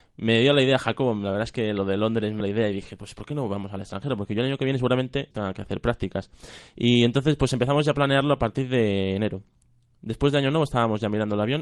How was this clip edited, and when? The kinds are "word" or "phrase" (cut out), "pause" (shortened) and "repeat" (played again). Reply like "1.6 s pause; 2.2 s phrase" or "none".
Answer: 2.4 s word; 5.3 s word